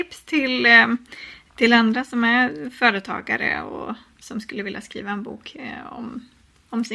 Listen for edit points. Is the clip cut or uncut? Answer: uncut